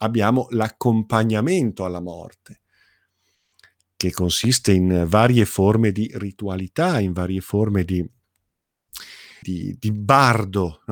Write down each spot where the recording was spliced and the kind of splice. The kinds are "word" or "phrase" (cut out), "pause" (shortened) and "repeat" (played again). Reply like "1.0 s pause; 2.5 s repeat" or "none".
9.4 s word